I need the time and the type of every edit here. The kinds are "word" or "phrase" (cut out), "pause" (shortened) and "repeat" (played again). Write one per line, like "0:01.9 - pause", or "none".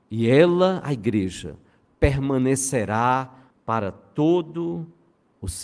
0:03.5 - word